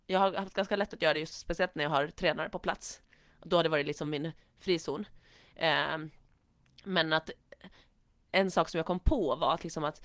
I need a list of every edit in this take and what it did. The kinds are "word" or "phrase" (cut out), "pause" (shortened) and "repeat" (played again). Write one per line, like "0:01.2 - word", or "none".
none